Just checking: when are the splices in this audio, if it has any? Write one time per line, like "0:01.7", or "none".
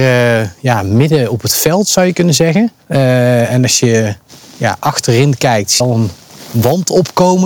0:02.8
0:05.8